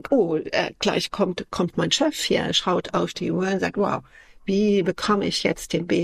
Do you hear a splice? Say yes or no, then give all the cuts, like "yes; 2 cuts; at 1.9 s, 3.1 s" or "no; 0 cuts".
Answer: no; 0 cuts